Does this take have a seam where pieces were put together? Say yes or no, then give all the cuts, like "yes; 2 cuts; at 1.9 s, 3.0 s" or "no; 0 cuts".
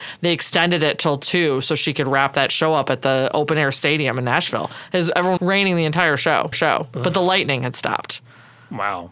yes; 2 cuts; at 5.4 s, 6.5 s